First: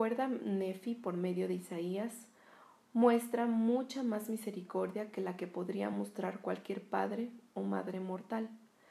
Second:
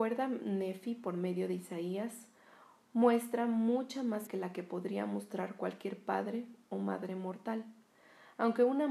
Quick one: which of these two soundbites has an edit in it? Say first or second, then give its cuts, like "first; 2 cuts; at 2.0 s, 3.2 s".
second; 1 cut; at 4.3 s